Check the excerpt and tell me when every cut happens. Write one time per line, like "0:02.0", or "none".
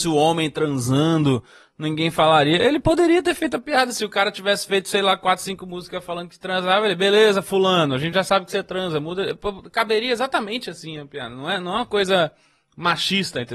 none